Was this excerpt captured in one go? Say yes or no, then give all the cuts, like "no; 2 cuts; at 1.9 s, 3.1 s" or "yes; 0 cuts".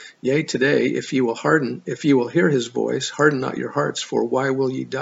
yes; 0 cuts